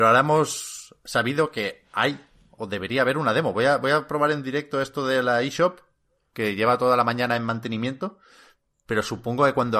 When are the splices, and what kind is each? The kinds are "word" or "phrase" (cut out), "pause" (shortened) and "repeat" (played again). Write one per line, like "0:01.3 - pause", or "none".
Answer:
none

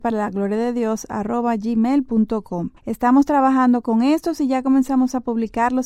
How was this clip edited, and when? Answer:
0:02.8 - pause

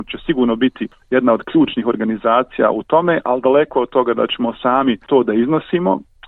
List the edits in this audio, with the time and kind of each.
none

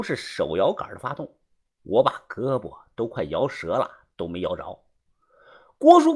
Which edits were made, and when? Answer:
none

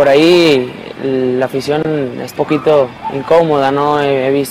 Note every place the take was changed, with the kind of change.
0:02.4 - word

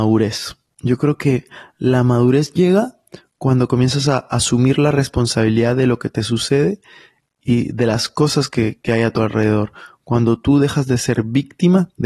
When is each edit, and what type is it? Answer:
none

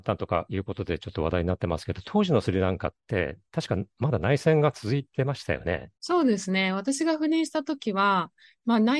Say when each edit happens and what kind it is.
0:06.0 - pause

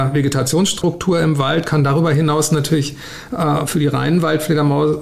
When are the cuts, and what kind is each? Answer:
none

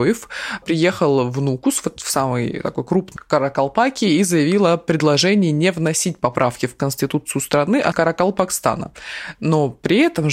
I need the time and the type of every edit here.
0:03.2 - word
0:07.9 - word

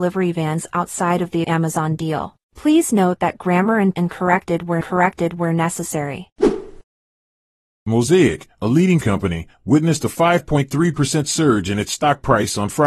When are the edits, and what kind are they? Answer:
0:01.4 - word
0:02.4 - pause
0:03.9 - phrase
0:04.8 - repeat
0:09.0 - word

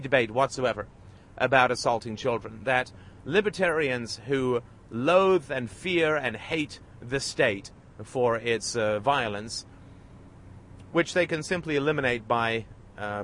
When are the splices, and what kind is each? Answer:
none

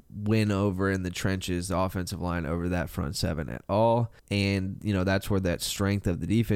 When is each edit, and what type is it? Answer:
0:04.2 - pause

